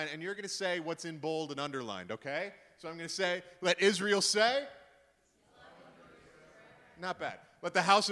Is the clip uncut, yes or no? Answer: yes